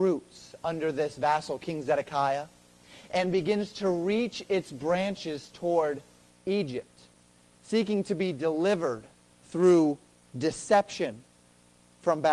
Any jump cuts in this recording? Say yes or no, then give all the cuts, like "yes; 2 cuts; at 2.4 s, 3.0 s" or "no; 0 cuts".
no; 0 cuts